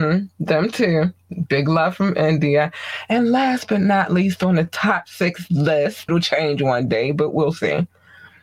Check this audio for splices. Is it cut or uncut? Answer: cut